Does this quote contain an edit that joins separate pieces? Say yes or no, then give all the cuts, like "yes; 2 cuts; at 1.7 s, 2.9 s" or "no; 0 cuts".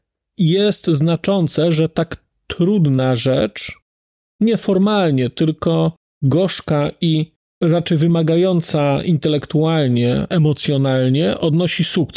no; 0 cuts